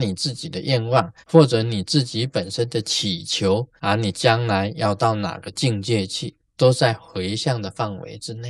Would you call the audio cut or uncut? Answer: cut